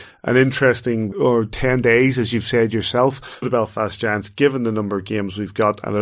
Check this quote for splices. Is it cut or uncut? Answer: cut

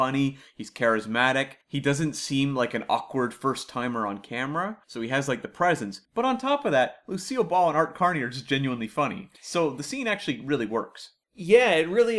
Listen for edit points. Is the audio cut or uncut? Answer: cut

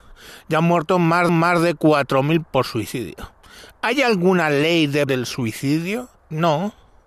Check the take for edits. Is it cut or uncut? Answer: cut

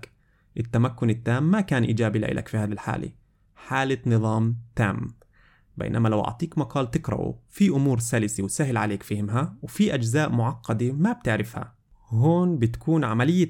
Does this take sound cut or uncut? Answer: uncut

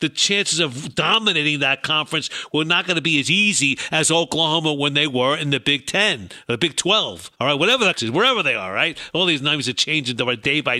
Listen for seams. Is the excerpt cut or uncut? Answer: cut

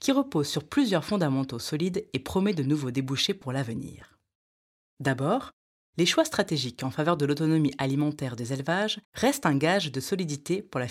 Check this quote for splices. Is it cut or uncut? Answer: cut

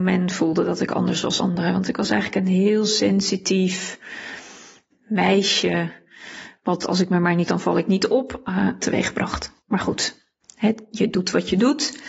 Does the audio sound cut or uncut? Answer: cut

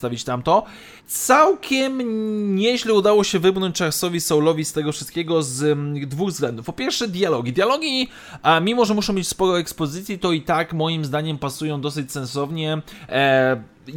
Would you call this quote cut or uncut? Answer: cut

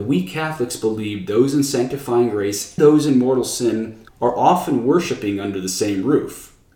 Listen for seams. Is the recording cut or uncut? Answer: cut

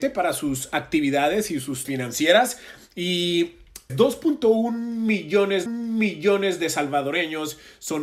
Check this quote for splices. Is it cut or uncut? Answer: cut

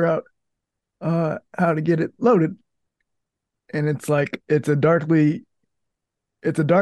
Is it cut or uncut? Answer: uncut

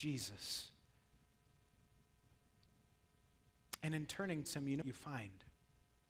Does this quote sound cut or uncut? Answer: cut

